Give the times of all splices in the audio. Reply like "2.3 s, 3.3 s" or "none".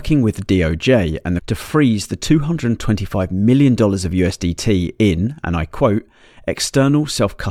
1.4 s